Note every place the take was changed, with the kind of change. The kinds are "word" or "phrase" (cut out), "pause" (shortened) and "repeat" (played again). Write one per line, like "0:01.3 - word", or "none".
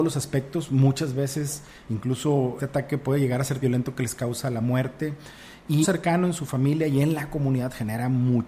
0:02.6 - word
0:03.6 - word
0:05.8 - phrase